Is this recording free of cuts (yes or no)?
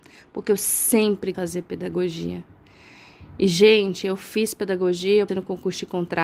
no